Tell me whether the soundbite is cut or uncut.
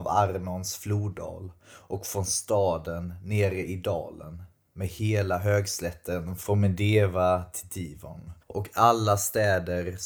cut